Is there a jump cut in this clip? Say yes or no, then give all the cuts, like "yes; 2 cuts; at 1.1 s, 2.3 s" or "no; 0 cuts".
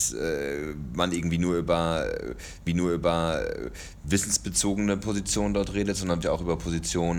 yes; 2 cuts; at 2.7 s, 6.2 s